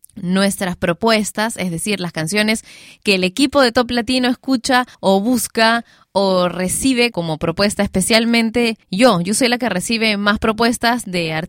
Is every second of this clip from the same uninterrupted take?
no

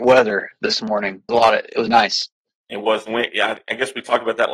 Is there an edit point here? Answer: yes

